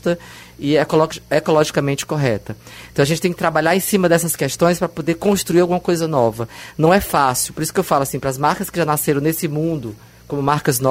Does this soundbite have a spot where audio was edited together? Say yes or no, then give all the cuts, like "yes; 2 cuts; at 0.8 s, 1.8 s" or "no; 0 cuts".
no; 0 cuts